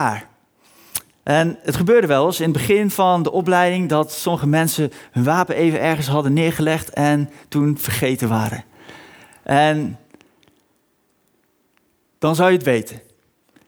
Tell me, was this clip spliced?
no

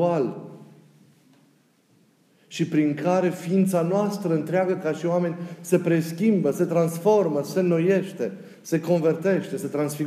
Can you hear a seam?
no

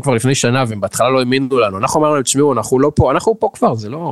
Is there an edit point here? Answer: no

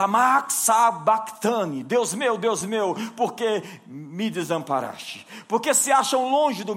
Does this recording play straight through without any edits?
yes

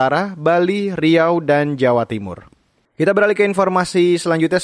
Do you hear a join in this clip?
no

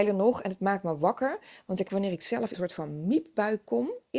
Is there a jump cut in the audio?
yes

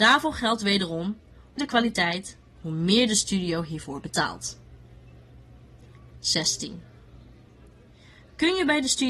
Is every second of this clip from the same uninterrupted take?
no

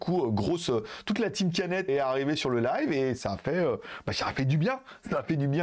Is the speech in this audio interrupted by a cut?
yes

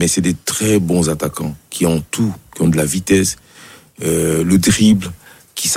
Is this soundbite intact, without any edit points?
yes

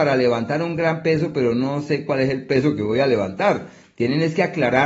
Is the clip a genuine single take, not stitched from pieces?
yes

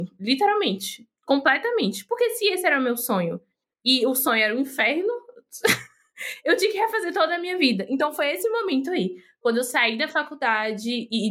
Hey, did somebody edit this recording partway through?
no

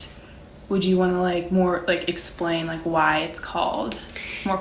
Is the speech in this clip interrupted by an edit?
no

